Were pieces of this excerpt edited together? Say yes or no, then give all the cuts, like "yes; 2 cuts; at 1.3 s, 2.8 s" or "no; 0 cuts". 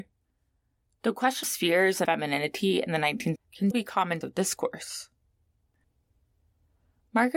yes; 5 cuts; at 1.4 s, 2.0 s, 3.4 s, 3.7 s, 4.2 s